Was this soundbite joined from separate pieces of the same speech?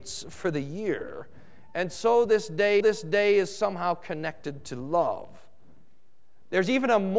yes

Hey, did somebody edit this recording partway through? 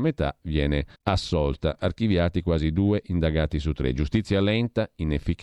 yes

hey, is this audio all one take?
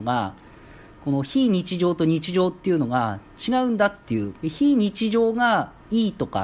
no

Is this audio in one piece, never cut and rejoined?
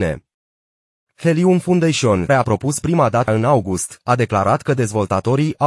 no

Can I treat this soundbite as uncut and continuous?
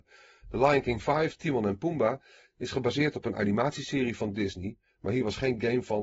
yes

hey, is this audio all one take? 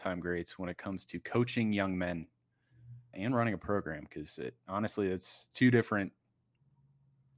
no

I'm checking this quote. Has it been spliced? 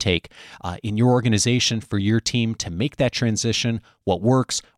no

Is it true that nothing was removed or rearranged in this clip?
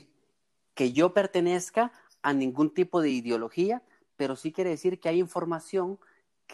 yes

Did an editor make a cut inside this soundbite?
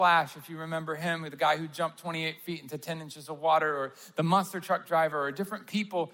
no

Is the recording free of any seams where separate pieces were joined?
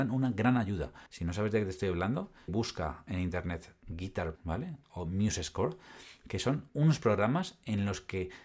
no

